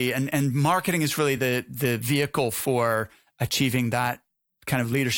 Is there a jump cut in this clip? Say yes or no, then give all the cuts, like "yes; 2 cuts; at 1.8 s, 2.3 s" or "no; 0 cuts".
no; 0 cuts